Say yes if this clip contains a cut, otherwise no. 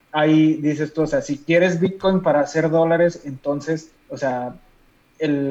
yes